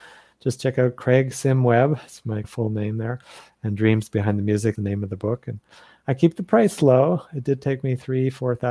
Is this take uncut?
no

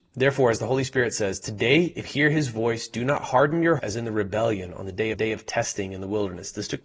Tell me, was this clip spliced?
yes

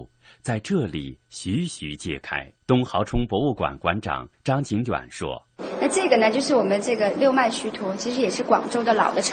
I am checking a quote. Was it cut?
yes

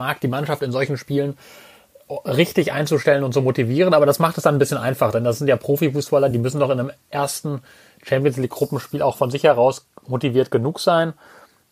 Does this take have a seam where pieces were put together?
no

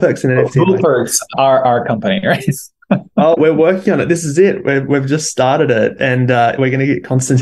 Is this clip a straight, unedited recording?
no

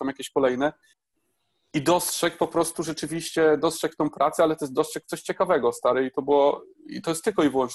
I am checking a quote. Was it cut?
yes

